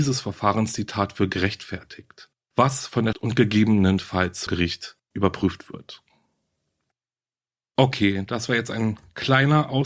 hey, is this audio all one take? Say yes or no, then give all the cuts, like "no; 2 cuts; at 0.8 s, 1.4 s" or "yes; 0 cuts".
no; 2 cuts; at 3.1 s, 4.5 s